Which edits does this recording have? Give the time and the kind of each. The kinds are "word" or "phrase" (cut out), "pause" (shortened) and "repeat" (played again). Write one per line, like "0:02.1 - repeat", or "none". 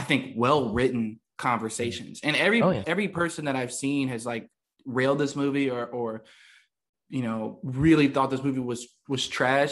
none